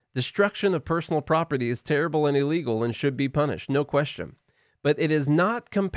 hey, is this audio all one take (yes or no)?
yes